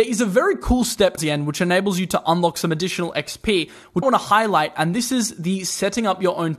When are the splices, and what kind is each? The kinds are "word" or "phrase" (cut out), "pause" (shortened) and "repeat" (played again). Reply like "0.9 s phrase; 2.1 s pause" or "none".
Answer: 1.2 s word; 4.0 s word